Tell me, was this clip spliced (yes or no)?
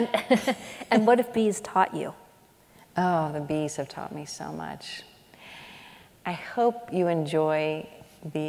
no